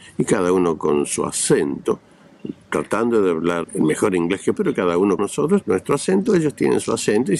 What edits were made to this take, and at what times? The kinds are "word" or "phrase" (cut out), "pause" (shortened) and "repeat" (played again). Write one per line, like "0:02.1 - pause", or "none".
0:03.6 - word
0:04.6 - word
0:05.2 - word
0:05.6 - word